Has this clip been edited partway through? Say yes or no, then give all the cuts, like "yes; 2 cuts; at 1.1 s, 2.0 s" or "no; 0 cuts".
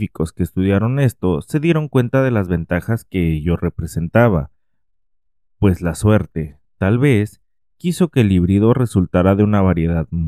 no; 0 cuts